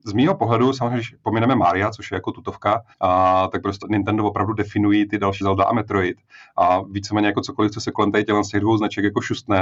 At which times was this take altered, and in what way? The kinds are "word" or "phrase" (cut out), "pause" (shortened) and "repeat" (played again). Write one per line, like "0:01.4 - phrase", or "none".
0:02.9 - pause
0:03.8 - word
0:05.4 - phrase